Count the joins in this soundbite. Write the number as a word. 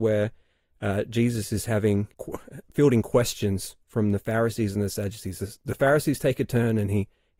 one